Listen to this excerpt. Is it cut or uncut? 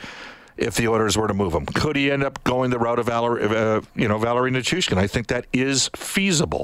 uncut